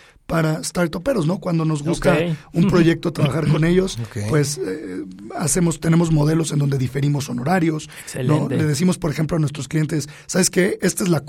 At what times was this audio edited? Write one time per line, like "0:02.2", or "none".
none

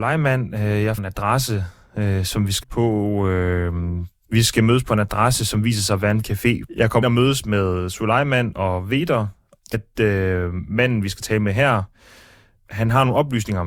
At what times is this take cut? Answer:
0:01.0
0:02.6
0:07.0
0:09.7

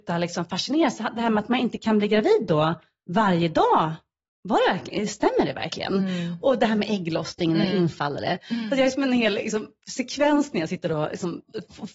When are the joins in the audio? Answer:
none

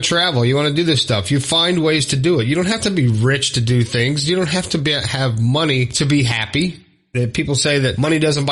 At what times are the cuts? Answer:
none

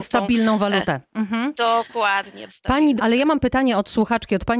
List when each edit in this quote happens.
0:02.5
0:03.0

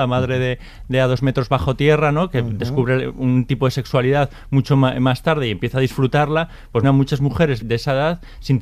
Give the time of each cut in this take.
0:06.8
0:07.6

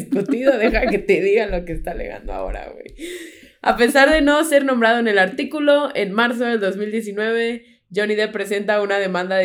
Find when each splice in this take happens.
none

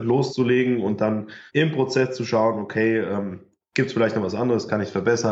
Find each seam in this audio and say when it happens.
0:01.5

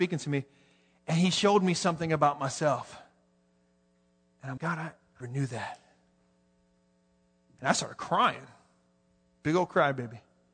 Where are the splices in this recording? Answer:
0:04.6
0:05.2

